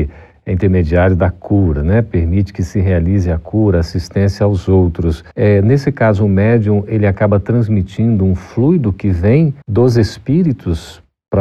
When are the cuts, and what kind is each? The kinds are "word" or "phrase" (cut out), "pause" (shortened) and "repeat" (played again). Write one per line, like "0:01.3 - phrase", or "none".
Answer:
0:05.3 - pause
0:09.6 - pause